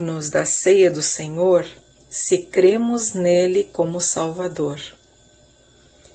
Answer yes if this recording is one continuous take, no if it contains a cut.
yes